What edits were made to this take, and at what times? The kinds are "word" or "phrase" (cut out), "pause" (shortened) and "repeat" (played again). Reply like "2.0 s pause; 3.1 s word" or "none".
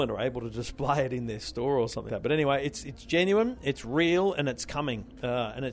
2.1 s word